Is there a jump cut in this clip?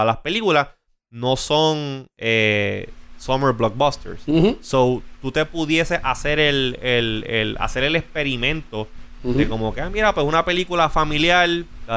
no; 0 cuts

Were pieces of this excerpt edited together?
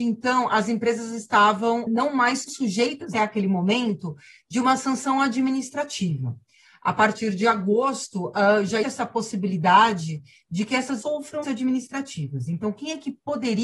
yes; 6 cuts; at 1.9 s, 2.5 s, 3.1 s, 8.8 s, 11.0 s, 11.4 s

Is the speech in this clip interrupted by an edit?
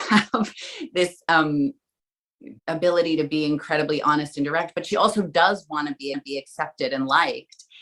yes; 2 cuts; at 2.6 s, 6.1 s

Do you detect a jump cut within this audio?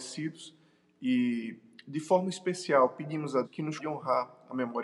yes; 2 cuts; at 3.4 s, 3.8 s

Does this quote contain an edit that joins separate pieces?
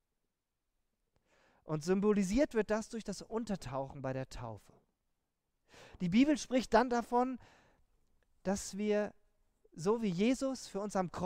no; 0 cuts

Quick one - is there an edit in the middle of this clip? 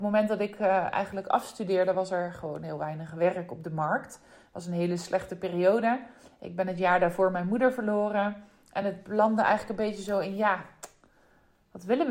no; 0 cuts

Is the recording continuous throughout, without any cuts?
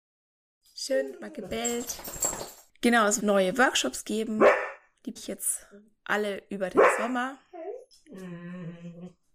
no; 2 cuts; at 3.2 s, 5.2 s

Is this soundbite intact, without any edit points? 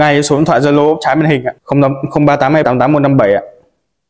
no; 2 cuts; at 1.6 s, 2.6 s

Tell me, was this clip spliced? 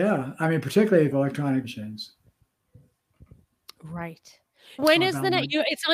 yes; 3 cuts; at 1.1 s, 1.6 s, 4.8 s

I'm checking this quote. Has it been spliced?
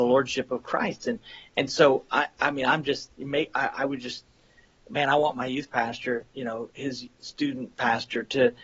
no; 0 cuts

